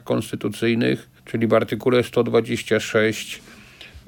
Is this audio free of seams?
no; 1 cut; at 1.2 s

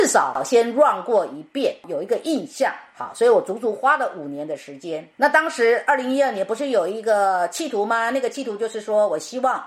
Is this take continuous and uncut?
no; 1 cut; at 5.1 s

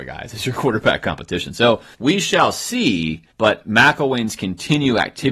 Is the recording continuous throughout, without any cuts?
no; 2 cuts; at 1.9 s, 3.3 s

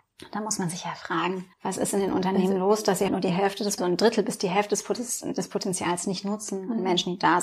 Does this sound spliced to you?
yes; 3 cuts; at 1.5 s, 3.1 s, 3.8 s

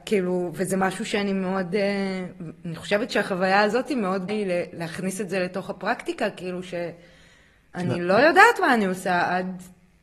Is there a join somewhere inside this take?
yes; 1 cut; at 4.3 s

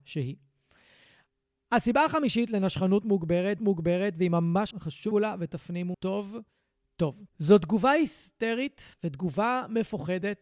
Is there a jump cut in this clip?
yes; 6 cuts; at 3.6 s, 4.7 s, 5.1 s, 5.9 s, 7.3 s, 8.9 s

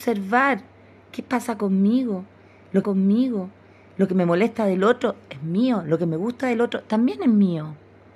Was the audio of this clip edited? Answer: yes; 1 cut; at 2.8 s

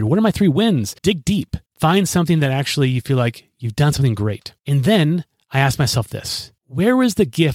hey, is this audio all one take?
no; 4 cuts; at 1.0 s, 1.7 s, 4.6 s, 6.6 s

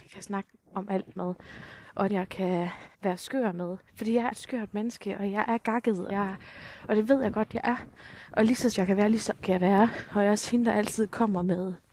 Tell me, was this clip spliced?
yes; 7 cuts; at 2.1 s, 2.9 s, 3.9 s, 4.3 s, 6.1 s, 8.7 s, 9.4 s

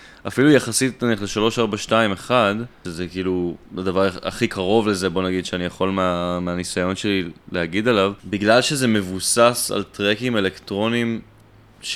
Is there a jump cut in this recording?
yes; 2 cuts; at 3.7 s, 8.2 s

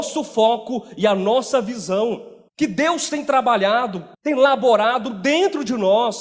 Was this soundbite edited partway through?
yes; 2 cuts; at 2.5 s, 4.1 s

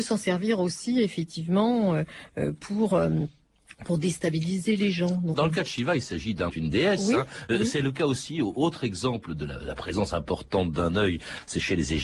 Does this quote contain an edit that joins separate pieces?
yes; 2 cuts; at 5.3 s, 6.5 s

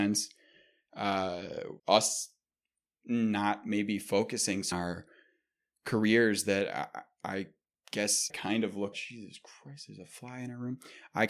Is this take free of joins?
no; 4 cuts; at 1.8 s, 4.7 s, 8.3 s, 8.9 s

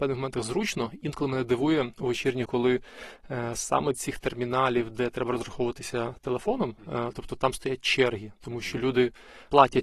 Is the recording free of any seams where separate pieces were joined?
no; 3 cuts; at 1.0 s, 2.5 s, 3.9 s

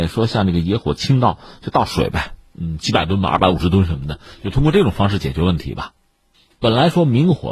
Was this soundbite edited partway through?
no; 0 cuts

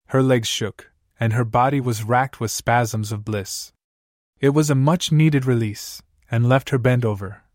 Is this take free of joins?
yes; 0 cuts

